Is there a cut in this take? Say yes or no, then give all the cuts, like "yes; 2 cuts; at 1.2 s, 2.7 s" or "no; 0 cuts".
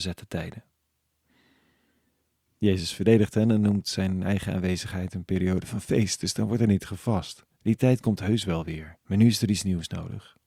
yes; 2 cuts; at 7.5 s, 9.0 s